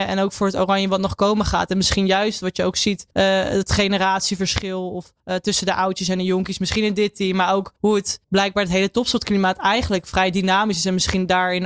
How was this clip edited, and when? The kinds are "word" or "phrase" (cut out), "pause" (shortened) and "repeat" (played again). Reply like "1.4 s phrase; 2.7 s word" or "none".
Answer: 3.1 s pause; 5.2 s pause; 7.8 s pause; 8.2 s pause